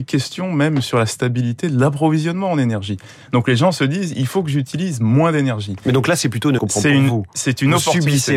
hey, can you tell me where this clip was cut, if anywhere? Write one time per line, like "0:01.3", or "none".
0:06.6

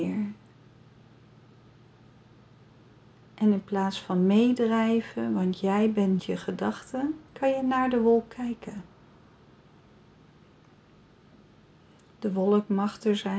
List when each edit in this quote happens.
0:06.2
0:07.3

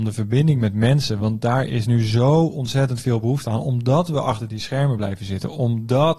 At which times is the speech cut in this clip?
none

